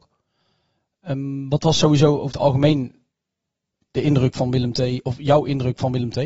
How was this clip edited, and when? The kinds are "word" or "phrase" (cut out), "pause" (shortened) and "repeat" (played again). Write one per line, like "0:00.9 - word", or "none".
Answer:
none

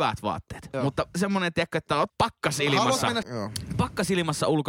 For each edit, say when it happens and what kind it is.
0:02.1 - word
0:03.2 - word

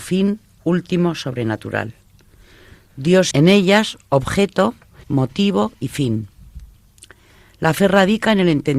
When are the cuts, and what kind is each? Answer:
0:03.3 - word
0:05.0 - word

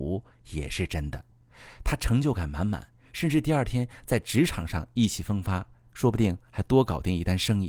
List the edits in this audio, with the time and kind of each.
none

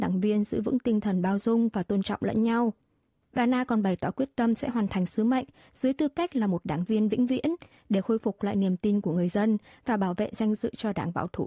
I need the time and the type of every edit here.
none

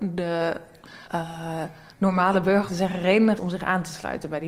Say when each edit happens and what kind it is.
0:01.1 - pause
0:02.7 - phrase
0:03.4 - word

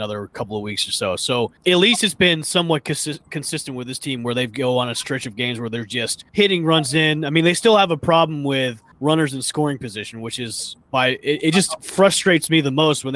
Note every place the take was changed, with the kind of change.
0:01.6 - pause
0:06.3 - pause
0:08.9 - pause

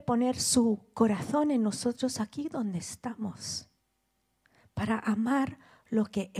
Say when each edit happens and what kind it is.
none

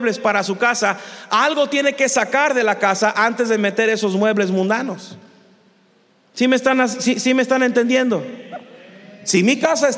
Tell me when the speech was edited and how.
none

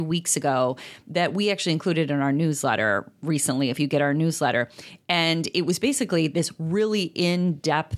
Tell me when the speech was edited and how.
none

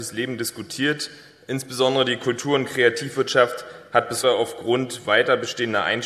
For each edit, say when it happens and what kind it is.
0:04.2 - word

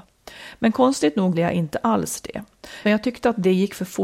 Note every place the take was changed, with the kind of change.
0:01.3 - word
0:02.8 - word

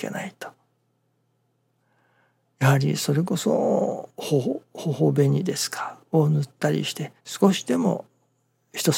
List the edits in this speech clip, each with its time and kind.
0:07.2 - pause

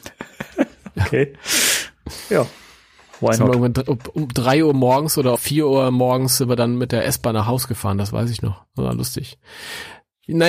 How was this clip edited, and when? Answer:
0:05.4 - word

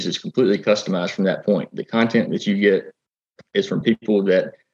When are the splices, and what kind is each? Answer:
none

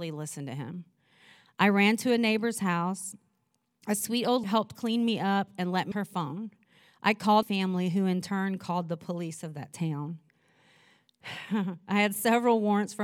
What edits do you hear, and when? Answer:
0:04.4 - word
0:05.9 - word
0:07.4 - word

